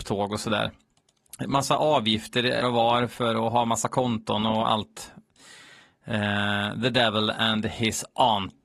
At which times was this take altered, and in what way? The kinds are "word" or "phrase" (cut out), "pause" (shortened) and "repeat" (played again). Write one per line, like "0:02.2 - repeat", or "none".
0:02.6 - word